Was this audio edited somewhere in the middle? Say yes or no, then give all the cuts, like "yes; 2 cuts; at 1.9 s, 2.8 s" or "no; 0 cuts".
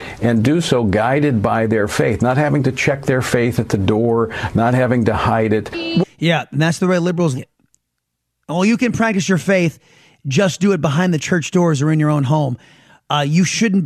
yes; 1 cut; at 7.4 s